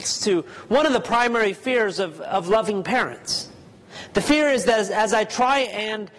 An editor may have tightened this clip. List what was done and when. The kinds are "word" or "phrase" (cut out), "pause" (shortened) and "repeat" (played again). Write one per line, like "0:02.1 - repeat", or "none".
none